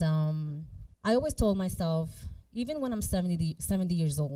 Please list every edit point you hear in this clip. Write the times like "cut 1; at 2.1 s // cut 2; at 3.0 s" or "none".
cut 1; at 0.9 s

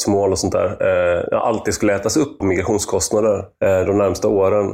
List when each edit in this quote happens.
cut 1; at 2.4 s

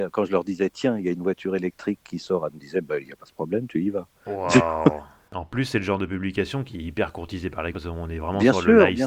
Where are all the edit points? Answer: cut 1; at 2.5 s // cut 2; at 7.7 s

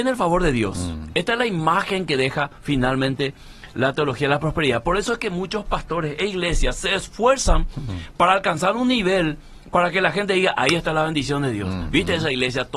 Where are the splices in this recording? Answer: none

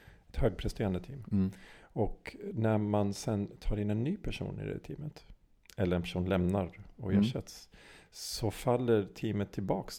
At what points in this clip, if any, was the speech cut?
none

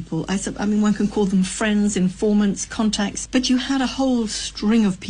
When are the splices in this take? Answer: cut 1; at 3.3 s

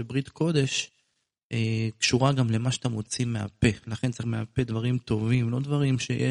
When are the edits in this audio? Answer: cut 1; at 4.2 s

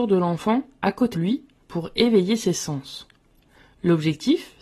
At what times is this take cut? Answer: cut 1; at 1.1 s

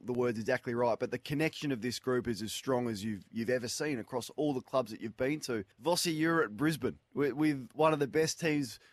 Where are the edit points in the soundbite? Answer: cut 1; at 5.7 s

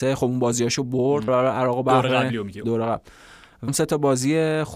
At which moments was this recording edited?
cut 1; at 1.3 s // cut 2; at 2.6 s // cut 3; at 3.7 s

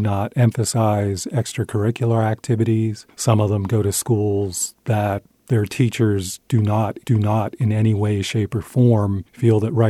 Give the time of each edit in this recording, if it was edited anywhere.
cut 1; at 7.0 s

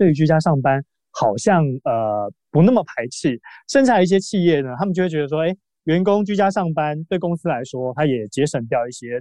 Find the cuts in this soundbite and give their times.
none

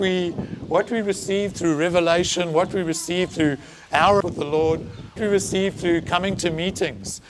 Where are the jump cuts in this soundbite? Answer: cut 1; at 4.2 s // cut 2; at 5.2 s

